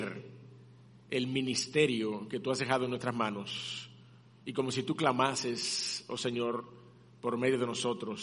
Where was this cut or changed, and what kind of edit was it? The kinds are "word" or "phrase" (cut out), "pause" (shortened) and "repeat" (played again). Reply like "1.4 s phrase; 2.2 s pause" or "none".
none